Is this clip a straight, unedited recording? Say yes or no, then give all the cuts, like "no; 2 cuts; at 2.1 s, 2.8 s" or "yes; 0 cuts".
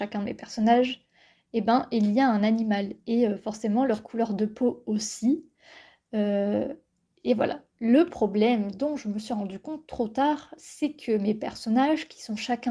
yes; 0 cuts